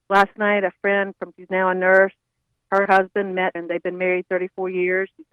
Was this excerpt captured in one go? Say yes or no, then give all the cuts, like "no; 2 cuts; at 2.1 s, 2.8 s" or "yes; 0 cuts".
no; 3 cuts; at 1.3 s, 2.9 s, 3.6 s